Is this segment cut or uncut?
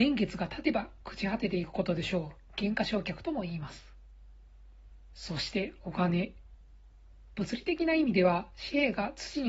cut